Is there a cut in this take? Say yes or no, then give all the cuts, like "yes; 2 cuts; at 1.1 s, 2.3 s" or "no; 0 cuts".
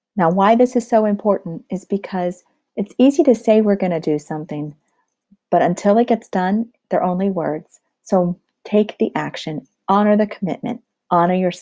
no; 0 cuts